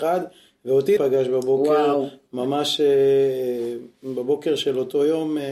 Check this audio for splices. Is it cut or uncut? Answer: cut